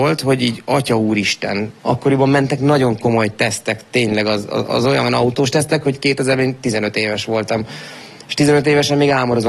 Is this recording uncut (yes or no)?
no